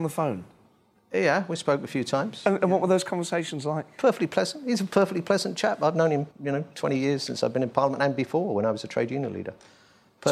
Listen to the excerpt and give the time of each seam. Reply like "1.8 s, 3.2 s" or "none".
6.3 s

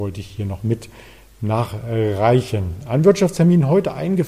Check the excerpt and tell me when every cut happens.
none

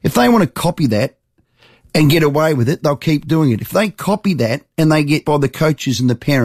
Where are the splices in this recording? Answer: 5.2 s

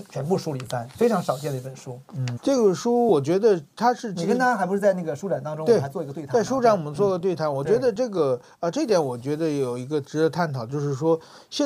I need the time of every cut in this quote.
0.9 s, 2.4 s

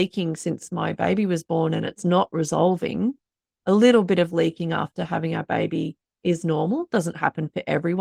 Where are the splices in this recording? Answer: none

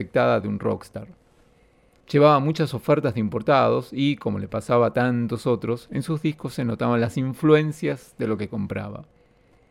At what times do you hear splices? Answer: none

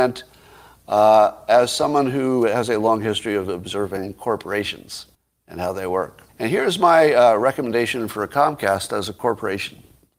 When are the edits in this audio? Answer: 5.1 s, 6.3 s

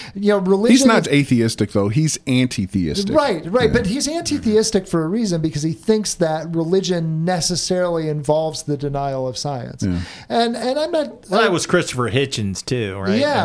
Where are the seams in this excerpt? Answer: 1.0 s

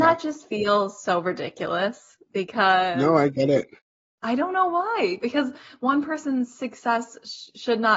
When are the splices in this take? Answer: 3.8 s

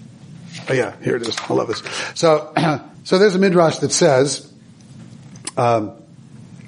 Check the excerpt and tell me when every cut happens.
2.9 s

